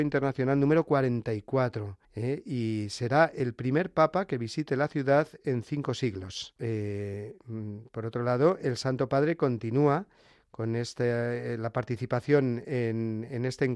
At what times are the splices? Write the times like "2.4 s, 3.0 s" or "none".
2.0 s, 6.6 s